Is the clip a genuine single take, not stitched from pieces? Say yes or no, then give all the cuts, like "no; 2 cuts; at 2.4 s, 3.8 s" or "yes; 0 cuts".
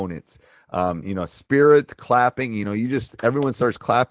yes; 0 cuts